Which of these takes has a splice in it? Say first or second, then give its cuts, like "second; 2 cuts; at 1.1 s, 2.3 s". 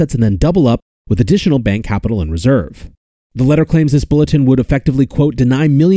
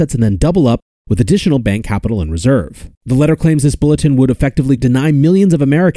second; 2 cuts; at 3.0 s, 4.8 s